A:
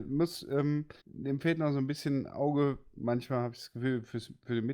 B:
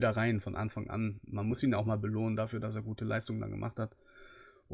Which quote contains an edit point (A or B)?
A